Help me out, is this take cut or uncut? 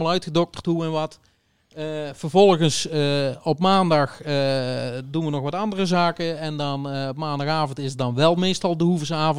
uncut